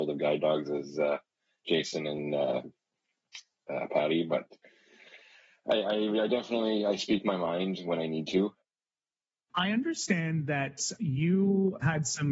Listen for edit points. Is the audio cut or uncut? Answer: uncut